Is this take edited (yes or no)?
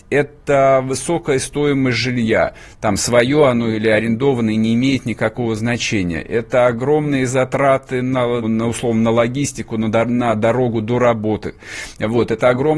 yes